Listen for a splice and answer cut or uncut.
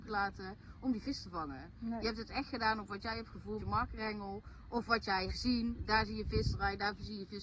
cut